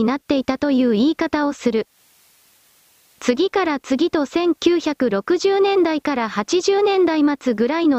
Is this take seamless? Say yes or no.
yes